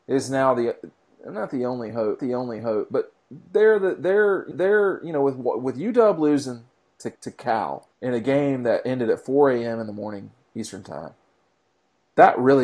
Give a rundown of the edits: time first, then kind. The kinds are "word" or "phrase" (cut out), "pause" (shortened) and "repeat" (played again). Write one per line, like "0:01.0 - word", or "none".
0:02.2 - repeat
0:04.5 - repeat
0:07.2 - pause
0:07.9 - pause